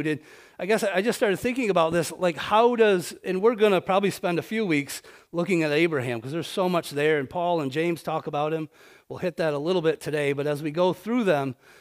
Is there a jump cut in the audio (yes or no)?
no